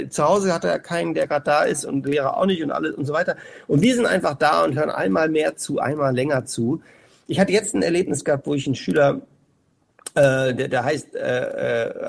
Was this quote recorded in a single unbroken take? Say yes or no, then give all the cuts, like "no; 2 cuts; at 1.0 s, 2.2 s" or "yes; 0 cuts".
yes; 0 cuts